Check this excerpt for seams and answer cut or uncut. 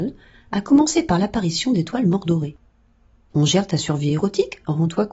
uncut